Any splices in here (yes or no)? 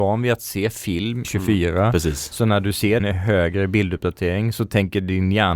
yes